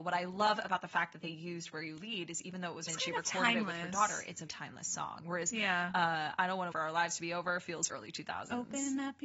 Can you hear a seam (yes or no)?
yes